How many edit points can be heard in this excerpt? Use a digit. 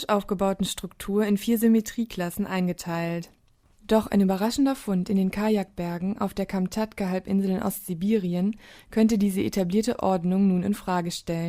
0